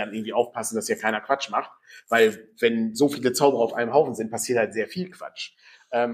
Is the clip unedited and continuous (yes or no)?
yes